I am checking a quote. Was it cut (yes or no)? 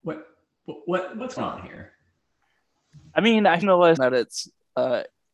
yes